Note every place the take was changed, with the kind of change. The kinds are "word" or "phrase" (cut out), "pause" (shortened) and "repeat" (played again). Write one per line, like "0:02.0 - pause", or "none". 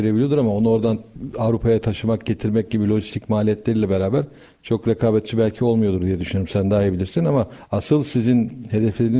none